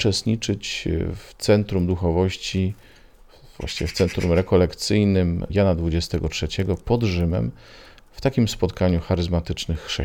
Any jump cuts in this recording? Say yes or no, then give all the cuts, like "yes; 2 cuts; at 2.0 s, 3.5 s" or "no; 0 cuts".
no; 0 cuts